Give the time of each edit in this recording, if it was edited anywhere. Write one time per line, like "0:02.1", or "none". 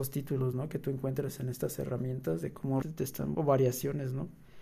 0:02.8
0:03.3